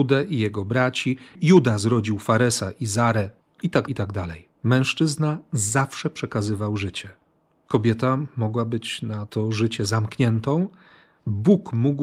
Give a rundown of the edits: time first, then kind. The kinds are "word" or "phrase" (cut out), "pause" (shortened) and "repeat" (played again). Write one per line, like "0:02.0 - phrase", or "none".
0:03.4 - word
0:03.9 - word
0:04.5 - pause